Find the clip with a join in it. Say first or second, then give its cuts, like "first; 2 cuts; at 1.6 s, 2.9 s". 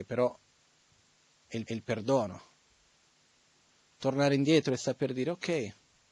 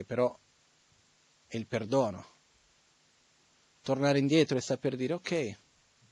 first; 1 cut; at 1.7 s